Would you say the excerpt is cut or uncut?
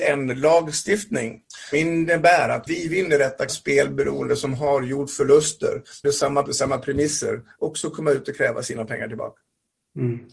cut